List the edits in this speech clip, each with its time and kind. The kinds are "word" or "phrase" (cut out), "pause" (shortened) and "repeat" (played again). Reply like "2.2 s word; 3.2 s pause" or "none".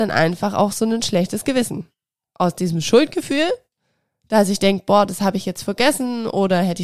none